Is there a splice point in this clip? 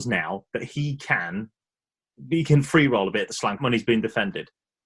yes; 1 cut; at 3.6 s

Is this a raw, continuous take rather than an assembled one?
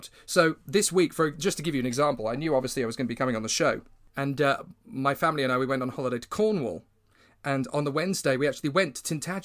yes; 0 cuts

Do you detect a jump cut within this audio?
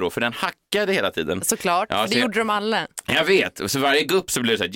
no; 0 cuts

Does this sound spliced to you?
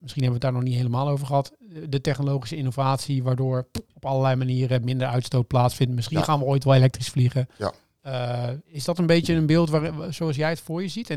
yes; 2 cuts; at 3.8 s, 8.6 s

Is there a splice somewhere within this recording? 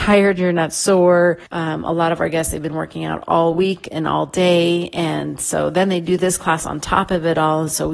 yes; 1 cut; at 1.5 s

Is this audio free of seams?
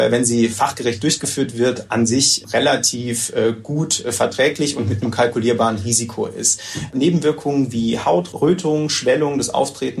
yes; 0 cuts

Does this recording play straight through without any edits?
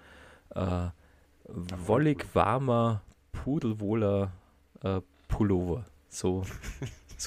yes; 0 cuts

